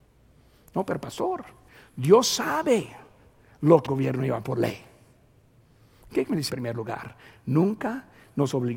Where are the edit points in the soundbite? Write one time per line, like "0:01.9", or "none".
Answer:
0:01.7
0:03.8
0:04.4
0:06.5